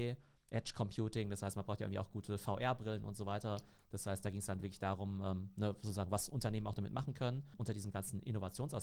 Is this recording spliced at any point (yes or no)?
no